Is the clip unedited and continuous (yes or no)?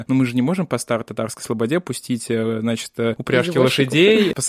yes